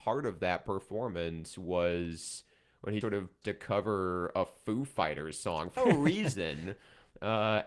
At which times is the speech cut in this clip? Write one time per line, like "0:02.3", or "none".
0:03.0
0:03.4
0:05.8